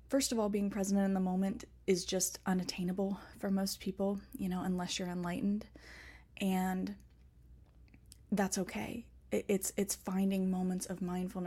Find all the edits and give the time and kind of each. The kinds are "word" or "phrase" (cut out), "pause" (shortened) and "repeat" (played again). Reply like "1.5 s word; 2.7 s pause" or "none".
8.2 s pause